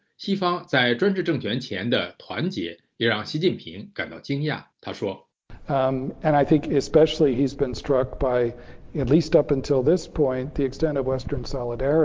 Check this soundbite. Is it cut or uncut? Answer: cut